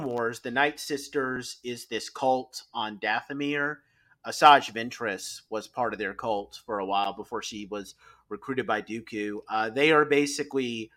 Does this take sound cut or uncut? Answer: uncut